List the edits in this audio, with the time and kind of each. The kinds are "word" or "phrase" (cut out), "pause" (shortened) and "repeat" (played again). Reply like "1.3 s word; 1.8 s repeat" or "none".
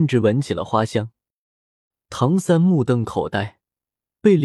none